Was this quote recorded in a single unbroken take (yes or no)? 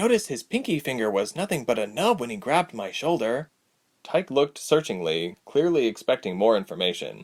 yes